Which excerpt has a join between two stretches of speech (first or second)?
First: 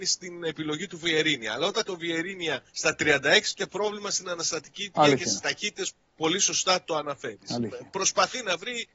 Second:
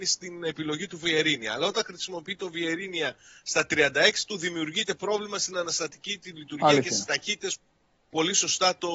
first